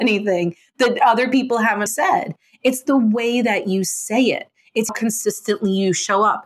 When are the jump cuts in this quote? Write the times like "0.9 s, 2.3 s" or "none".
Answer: 1.9 s, 4.9 s